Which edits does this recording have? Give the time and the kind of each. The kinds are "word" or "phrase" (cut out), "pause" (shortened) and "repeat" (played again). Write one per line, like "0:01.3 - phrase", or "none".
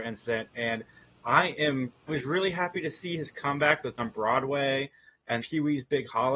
0:02.1 - word
0:04.0 - word
0:05.4 - word